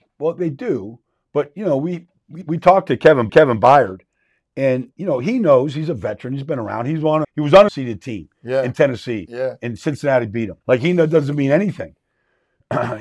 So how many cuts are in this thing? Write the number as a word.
six